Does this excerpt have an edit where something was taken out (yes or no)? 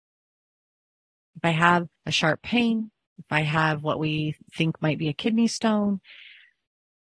yes